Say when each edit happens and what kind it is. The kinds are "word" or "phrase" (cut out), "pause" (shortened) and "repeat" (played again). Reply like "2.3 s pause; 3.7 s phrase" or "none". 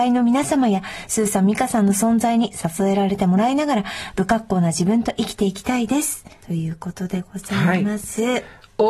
6.4 s pause